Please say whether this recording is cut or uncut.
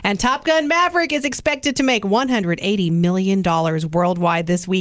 uncut